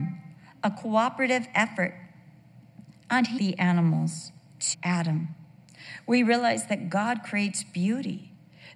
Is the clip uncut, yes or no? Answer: no